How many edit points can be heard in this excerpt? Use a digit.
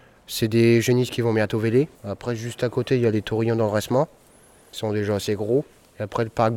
1